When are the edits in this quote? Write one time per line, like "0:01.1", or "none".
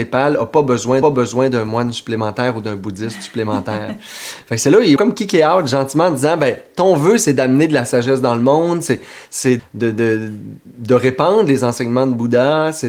0:01.0
0:05.0
0:09.6